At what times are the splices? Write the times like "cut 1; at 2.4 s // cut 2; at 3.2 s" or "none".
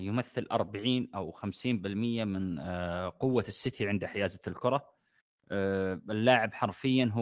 none